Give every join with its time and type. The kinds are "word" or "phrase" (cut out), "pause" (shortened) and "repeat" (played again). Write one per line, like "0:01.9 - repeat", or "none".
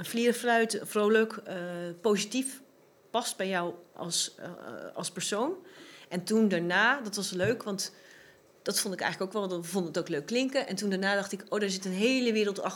none